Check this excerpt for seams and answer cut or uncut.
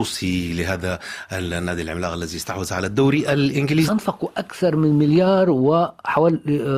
cut